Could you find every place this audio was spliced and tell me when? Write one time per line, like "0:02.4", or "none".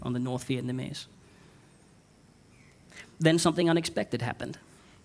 none